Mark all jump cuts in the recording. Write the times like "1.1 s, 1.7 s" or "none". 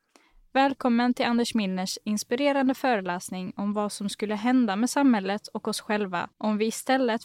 6.3 s